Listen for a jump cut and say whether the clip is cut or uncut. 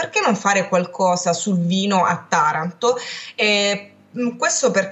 uncut